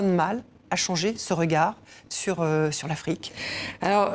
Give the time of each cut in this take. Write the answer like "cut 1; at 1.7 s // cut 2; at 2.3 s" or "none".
none